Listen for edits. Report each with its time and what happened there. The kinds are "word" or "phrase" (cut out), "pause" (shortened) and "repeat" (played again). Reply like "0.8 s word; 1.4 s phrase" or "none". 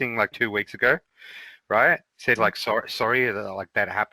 2.4 s word